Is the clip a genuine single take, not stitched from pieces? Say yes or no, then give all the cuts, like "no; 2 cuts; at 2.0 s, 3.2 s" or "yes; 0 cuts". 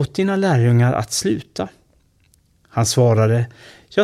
yes; 0 cuts